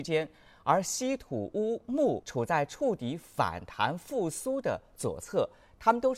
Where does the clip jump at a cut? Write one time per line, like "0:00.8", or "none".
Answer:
0:02.2

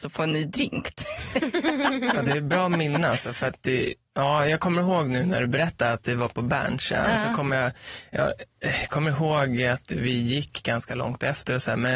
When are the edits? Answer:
none

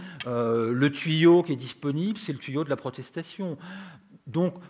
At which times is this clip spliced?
none

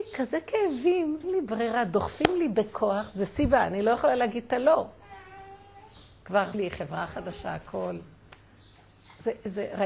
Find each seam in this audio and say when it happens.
0:01.2
0:06.5

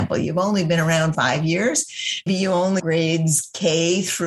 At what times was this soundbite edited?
0:01.1
0:02.3
0:02.8

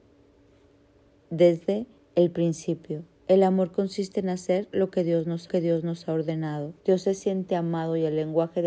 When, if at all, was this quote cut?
0:02.0
0:03.1
0:05.5
0:06.8

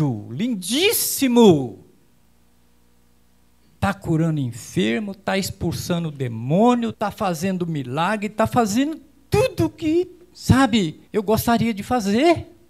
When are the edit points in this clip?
0:06.9
0:11.1

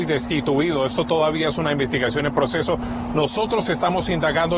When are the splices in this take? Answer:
none

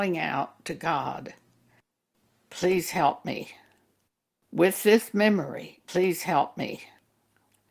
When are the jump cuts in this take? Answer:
none

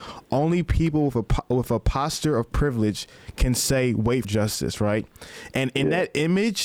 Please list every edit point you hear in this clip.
0:04.2

